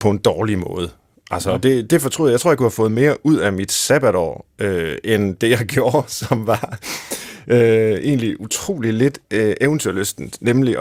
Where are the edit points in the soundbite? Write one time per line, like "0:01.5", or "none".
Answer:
none